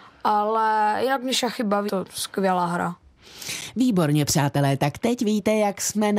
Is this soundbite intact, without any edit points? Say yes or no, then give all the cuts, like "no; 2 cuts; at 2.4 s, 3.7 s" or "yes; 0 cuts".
no; 1 cut; at 1.9 s